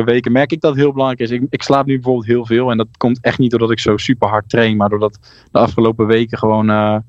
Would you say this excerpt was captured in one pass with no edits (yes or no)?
yes